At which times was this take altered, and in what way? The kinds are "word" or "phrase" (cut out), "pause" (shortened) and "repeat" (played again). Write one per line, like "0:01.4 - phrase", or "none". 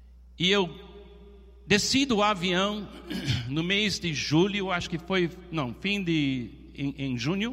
none